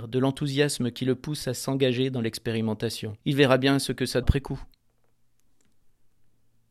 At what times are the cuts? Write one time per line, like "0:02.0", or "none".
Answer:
0:03.2
0:04.2